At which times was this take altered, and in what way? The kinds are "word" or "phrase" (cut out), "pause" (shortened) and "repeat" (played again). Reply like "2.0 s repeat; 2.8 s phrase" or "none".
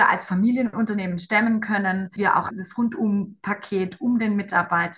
2.2 s word; 2.5 s word